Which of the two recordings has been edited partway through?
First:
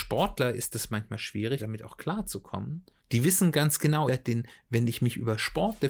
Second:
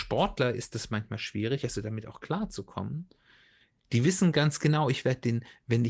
first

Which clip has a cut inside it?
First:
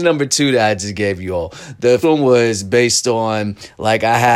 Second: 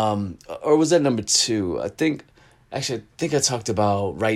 first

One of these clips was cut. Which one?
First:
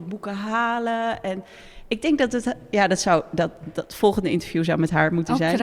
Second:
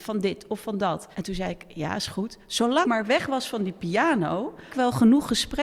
second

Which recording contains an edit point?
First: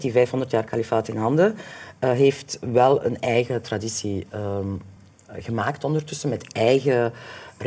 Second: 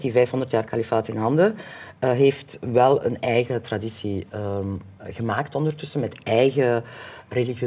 second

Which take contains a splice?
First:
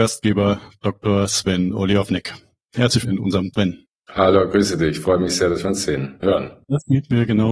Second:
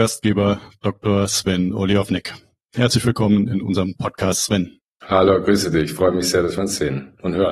first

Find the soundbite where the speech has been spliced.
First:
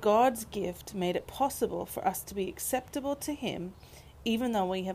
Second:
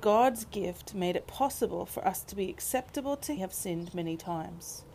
second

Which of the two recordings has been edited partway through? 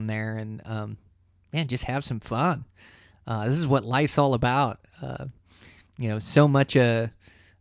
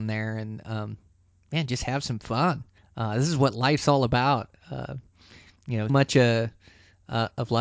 second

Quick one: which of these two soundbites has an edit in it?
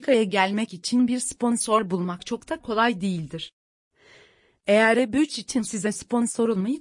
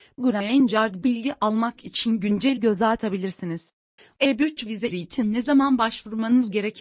second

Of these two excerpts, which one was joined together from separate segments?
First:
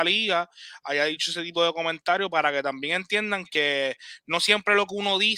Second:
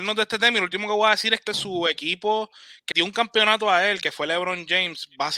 second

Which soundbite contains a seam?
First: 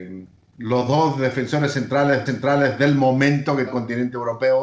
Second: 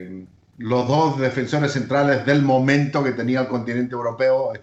first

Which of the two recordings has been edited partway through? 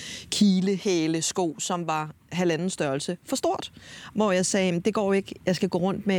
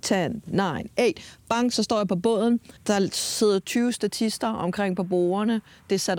second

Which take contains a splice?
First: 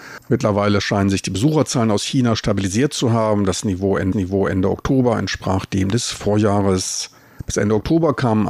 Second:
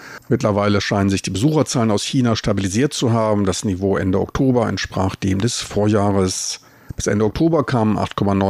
first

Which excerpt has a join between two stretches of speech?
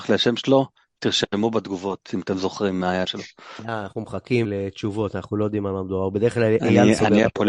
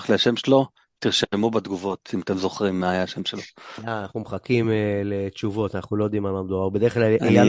first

